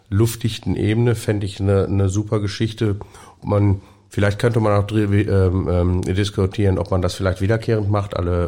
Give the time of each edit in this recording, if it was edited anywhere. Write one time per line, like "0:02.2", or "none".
none

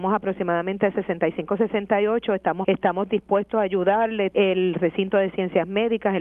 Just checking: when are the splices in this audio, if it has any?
0:02.6
0:04.3

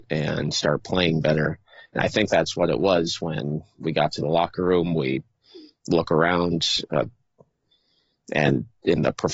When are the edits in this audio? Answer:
none

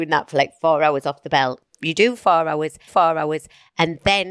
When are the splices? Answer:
0:01.7
0:02.9

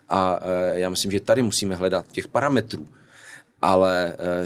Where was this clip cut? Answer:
0:02.1

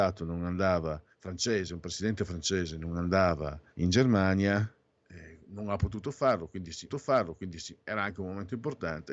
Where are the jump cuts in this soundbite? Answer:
0:01.1
0:03.7
0:06.9

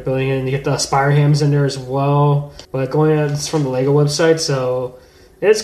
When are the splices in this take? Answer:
0:02.6

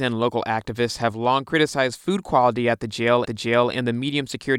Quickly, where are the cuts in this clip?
0:03.3

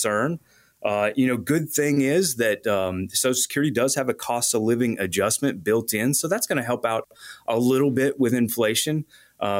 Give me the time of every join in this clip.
none

